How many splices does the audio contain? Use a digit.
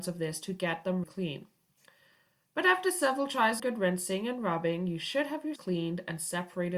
3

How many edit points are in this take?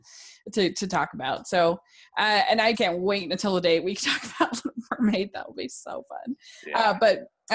1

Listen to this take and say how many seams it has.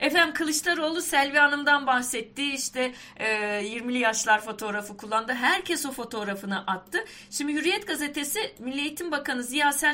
0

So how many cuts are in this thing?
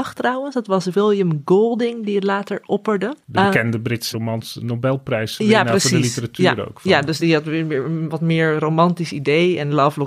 3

